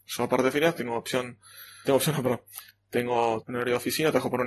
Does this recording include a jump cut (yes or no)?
yes